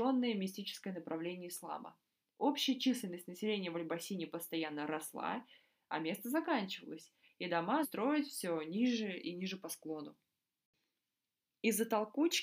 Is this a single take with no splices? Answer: no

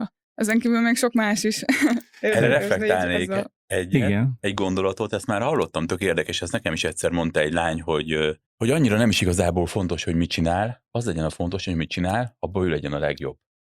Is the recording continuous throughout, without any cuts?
no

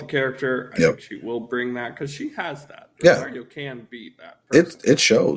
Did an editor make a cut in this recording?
no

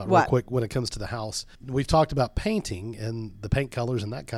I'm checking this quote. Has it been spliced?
yes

